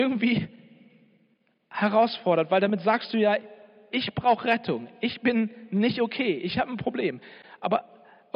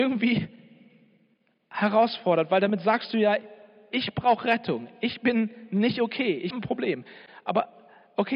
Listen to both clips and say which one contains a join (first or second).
second